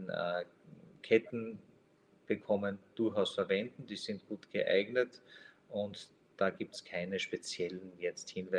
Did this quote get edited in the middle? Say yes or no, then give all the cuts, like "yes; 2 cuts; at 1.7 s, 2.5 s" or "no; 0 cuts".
no; 0 cuts